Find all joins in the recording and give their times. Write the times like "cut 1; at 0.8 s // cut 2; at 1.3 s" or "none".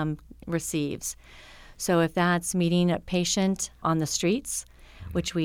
cut 1; at 3.8 s